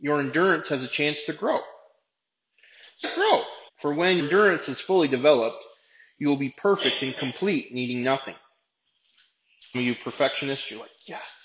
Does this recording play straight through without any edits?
no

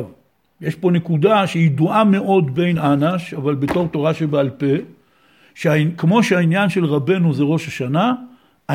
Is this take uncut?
yes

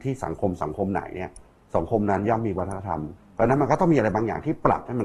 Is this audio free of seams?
yes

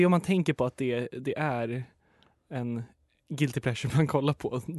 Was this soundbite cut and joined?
no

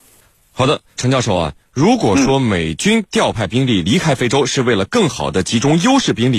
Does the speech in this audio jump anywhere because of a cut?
yes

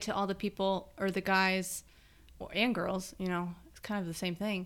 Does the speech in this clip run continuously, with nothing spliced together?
yes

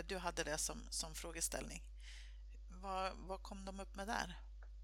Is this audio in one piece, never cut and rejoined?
yes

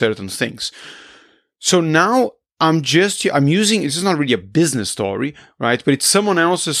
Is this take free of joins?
yes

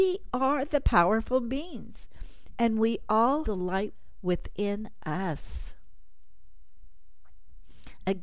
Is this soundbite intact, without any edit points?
no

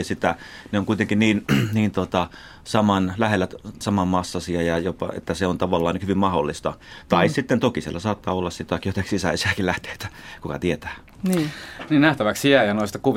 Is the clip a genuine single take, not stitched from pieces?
no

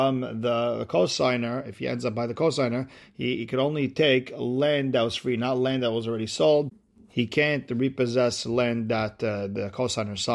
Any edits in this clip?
no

